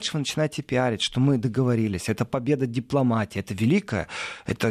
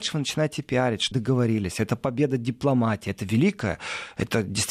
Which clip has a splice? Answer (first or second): second